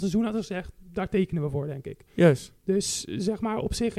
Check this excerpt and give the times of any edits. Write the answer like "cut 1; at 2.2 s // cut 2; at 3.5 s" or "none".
none